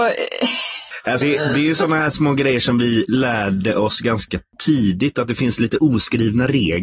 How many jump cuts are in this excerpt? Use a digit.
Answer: 1